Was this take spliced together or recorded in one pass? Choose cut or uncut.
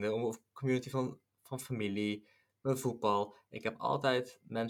uncut